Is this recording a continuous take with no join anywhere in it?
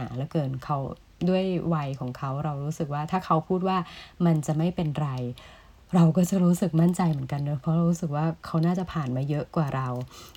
yes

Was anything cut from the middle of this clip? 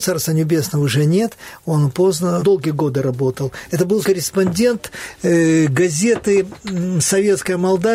yes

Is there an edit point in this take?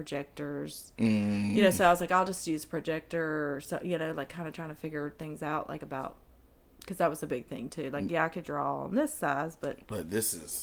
no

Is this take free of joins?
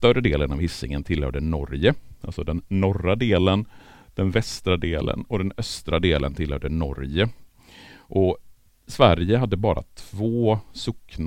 yes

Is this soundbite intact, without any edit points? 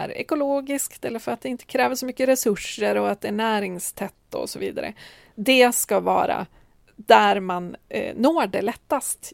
yes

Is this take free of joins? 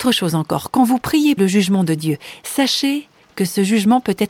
no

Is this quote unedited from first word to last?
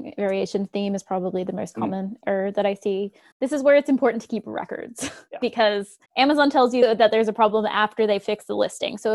no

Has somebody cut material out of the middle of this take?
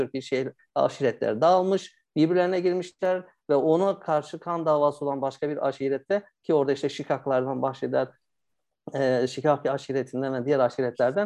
no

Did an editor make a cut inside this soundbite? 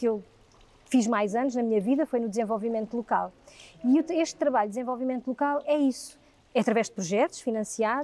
no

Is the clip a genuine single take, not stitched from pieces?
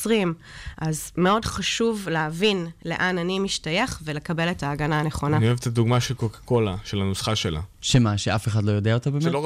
no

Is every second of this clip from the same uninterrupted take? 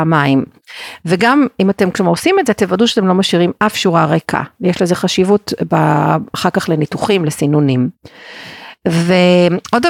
yes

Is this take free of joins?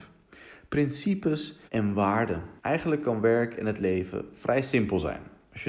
no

